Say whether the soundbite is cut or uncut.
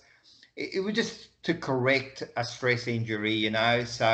uncut